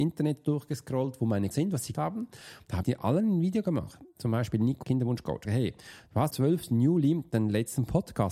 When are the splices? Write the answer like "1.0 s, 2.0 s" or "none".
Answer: 1.5 s, 1.9 s, 2.8 s, 4.8 s, 5.4 s, 6.3 s